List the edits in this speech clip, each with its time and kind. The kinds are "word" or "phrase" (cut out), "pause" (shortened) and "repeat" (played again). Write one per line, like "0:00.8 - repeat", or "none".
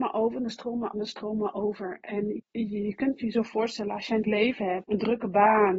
0:00.9 - word
0:02.4 - word
0:04.2 - word
0:04.8 - word